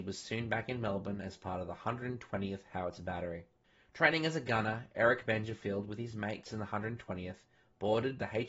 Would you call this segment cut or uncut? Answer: uncut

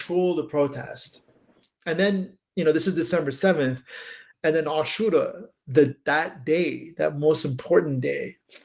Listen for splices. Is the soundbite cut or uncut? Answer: uncut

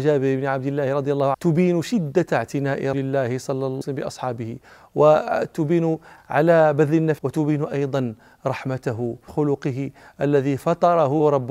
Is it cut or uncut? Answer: cut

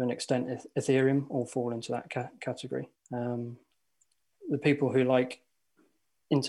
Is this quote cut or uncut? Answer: cut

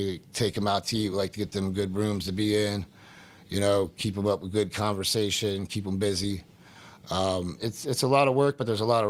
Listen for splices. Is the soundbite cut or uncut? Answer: uncut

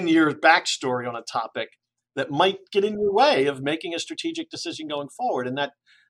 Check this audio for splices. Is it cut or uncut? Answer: uncut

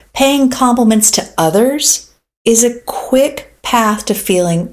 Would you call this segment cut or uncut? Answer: uncut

